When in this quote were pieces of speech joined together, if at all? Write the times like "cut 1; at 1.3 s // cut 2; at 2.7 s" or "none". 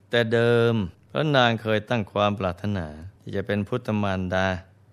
cut 1; at 0.9 s // cut 2; at 3.2 s